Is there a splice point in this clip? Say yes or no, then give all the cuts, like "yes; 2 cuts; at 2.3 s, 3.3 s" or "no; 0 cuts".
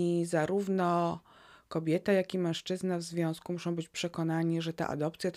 no; 0 cuts